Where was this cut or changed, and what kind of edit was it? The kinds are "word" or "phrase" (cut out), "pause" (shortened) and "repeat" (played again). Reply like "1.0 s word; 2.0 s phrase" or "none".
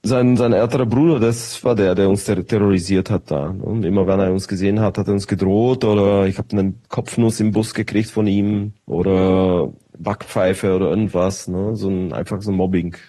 8.8 s pause